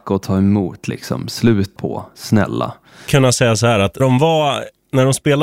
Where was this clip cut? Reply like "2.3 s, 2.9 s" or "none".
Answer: 1.8 s, 3.1 s, 4.0 s